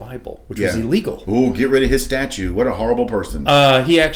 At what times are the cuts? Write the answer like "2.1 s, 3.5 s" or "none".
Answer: none